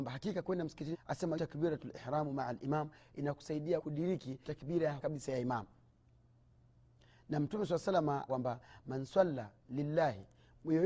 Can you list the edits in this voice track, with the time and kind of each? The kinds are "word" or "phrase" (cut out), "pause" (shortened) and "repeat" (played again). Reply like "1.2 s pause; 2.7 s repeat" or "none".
0.9 s word; 1.3 s word; 3.8 s word; 4.4 s word; 5.0 s word; 8.3 s word